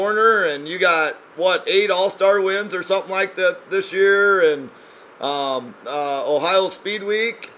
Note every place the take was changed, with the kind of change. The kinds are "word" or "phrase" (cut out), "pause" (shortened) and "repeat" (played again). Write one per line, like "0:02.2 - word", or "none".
0:01.3 - pause
0:05.8 - phrase

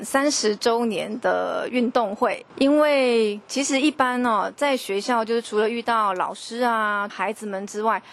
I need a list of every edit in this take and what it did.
0:07.1 - phrase

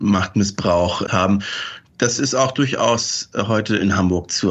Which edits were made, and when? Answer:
0:01.1 - word

